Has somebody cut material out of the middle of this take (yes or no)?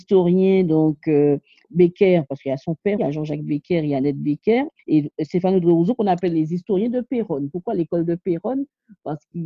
yes